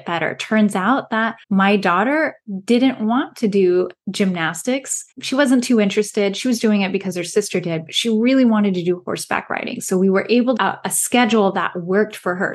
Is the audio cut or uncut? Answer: cut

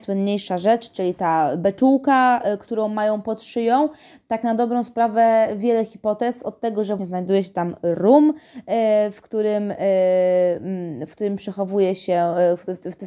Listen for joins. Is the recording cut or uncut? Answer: cut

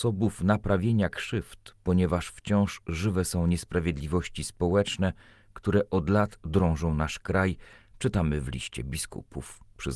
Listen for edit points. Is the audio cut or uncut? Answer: uncut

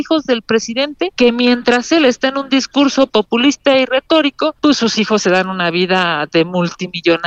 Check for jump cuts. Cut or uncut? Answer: uncut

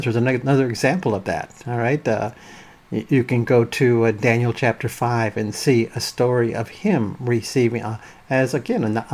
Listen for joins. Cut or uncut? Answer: uncut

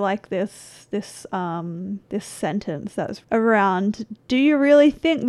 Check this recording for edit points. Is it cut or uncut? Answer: cut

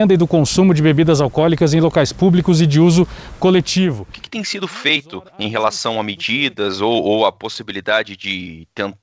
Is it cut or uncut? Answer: cut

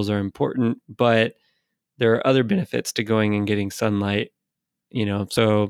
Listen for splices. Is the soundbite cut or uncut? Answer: uncut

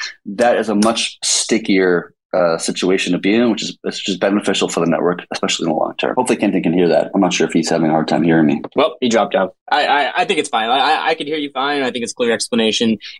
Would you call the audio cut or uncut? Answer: cut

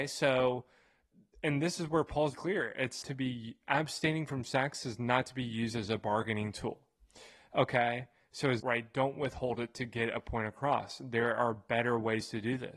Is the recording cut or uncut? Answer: cut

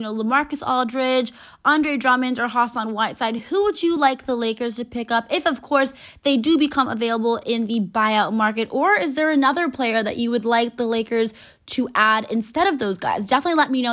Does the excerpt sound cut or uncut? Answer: uncut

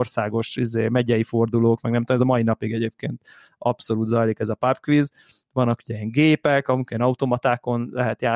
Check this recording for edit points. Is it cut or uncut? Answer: uncut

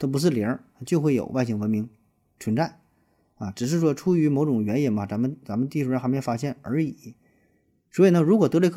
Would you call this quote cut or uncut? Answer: uncut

